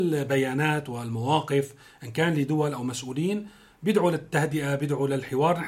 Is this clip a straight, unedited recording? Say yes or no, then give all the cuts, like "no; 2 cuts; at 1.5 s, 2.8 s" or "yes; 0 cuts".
yes; 0 cuts